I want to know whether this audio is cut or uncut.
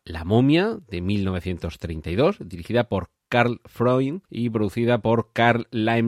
cut